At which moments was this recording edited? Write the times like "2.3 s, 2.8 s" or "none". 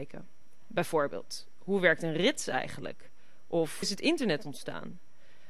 3.8 s